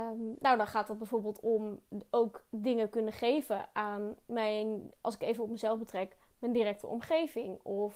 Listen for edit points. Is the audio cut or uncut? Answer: uncut